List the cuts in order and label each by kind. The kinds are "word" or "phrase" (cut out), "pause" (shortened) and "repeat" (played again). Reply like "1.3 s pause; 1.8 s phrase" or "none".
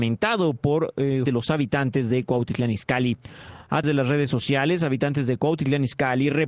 1.3 s word; 3.8 s word